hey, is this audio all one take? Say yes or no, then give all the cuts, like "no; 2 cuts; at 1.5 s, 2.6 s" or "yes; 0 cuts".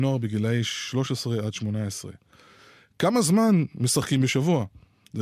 yes; 0 cuts